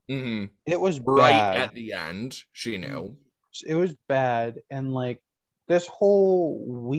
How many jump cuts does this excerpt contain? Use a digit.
0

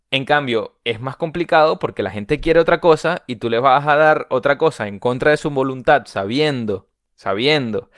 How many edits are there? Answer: 0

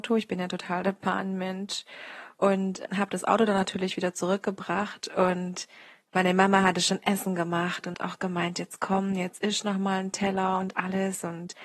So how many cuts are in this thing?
2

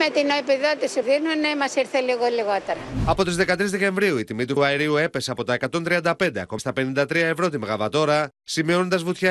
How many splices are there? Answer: 3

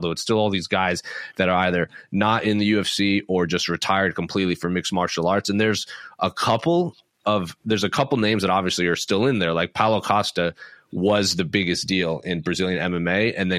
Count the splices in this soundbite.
0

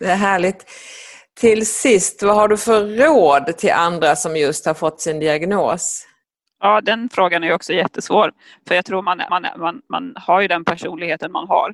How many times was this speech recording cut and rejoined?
1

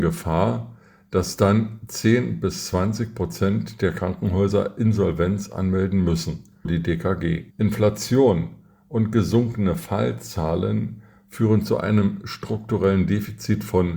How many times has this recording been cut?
2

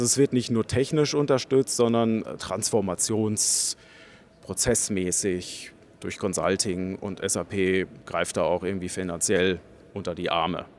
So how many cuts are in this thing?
1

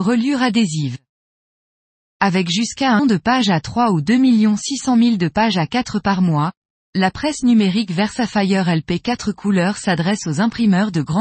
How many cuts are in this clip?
1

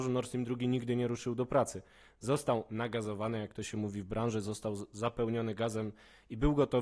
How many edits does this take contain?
0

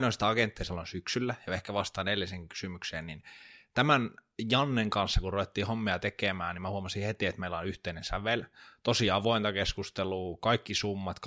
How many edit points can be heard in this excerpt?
0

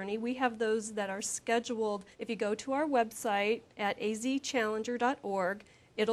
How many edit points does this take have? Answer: 2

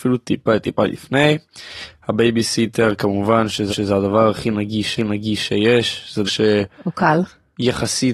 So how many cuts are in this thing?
3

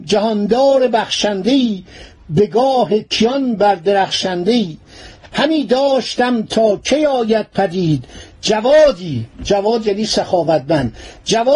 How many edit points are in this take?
0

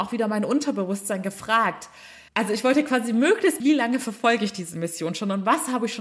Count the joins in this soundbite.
2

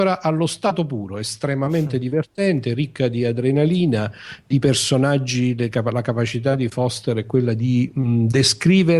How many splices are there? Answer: 0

